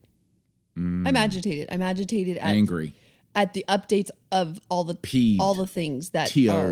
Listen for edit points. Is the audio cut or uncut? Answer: uncut